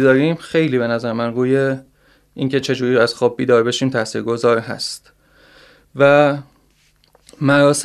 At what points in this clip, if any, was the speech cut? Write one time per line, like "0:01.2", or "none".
none